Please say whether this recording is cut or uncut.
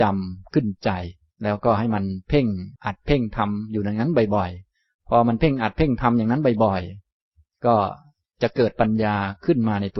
cut